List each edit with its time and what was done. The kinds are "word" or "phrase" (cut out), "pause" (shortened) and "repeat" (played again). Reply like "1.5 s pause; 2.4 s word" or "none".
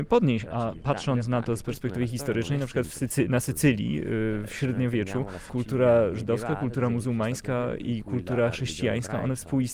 none